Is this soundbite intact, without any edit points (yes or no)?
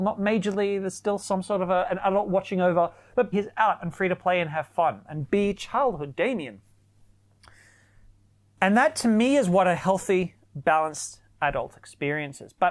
no